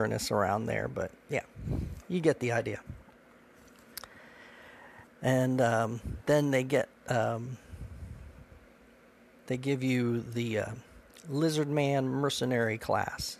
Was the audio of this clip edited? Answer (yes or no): no